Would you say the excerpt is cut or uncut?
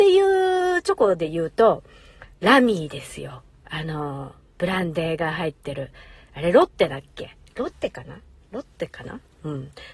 uncut